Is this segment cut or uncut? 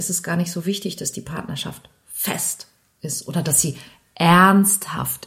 uncut